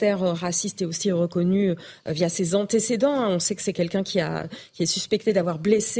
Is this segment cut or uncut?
uncut